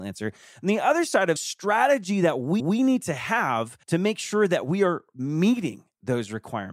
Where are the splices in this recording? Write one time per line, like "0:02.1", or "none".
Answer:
0:01.4
0:02.6
0:03.8